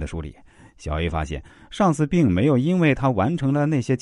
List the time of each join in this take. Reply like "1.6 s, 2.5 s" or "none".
none